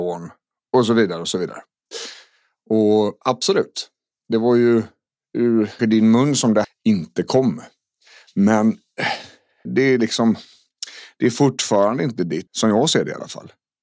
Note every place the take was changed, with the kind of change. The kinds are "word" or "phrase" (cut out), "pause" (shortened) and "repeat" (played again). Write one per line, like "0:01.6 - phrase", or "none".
0:05.8 - word
0:06.6 - word
0:09.7 - word
0:12.5 - word